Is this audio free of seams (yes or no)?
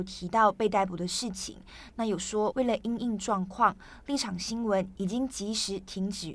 yes